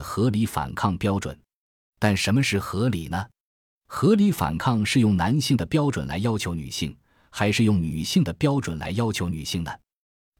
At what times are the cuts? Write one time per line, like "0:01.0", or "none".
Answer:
none